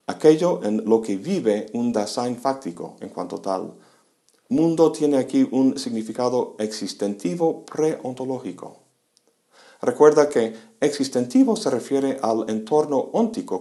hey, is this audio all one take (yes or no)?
yes